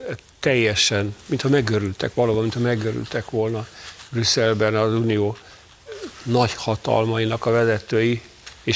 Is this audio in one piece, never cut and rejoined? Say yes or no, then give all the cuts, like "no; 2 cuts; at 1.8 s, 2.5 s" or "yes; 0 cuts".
yes; 0 cuts